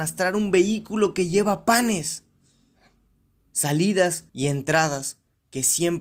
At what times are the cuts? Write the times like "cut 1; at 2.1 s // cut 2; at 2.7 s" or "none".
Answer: cut 1; at 4.3 s